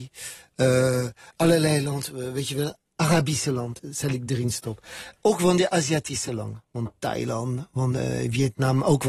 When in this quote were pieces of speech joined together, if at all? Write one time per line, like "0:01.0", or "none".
none